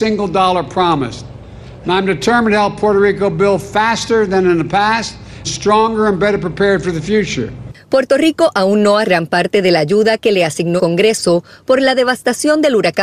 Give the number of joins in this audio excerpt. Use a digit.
3